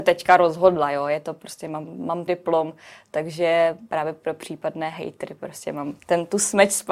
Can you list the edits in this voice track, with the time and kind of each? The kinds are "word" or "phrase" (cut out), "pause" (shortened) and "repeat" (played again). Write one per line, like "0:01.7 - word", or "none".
0:02.3 - word
0:06.0 - pause